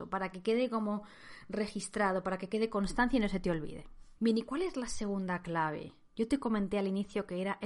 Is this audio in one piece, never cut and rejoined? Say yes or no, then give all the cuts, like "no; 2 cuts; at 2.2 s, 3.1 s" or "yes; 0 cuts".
no; 1 cut; at 4.2 s